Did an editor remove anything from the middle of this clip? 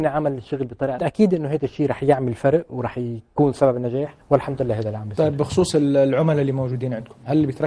yes; 2 cuts; at 1.0 s, 4.2 s

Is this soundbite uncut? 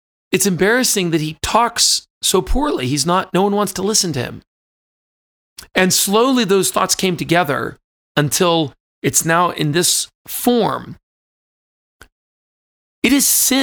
yes; 0 cuts

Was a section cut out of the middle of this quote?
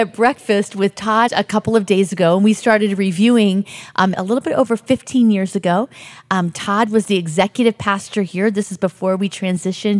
yes; 2 cuts; at 1.3 s, 4.1 s

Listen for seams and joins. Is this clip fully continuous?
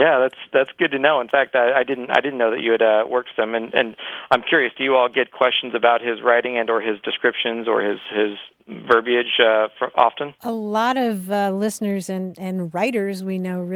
yes; 0 cuts

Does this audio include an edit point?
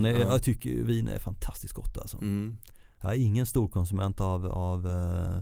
no; 0 cuts

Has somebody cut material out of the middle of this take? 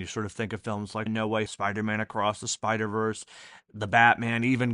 yes; 2 cuts; at 1.1 s, 1.5 s

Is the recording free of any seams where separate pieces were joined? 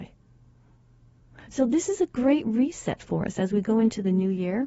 yes; 0 cuts

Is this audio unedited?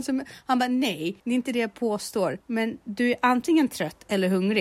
no; 2 cuts; at 1.2 s, 2.4 s

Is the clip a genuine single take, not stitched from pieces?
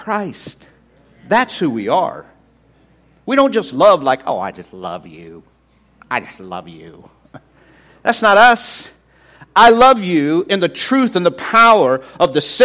yes; 0 cuts

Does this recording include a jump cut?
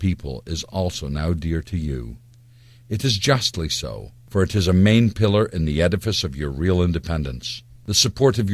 no; 0 cuts

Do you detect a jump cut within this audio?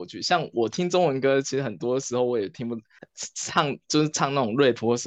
yes; 1 cut; at 3.0 s

